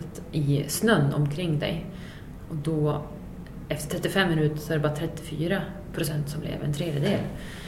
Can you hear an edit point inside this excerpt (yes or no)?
no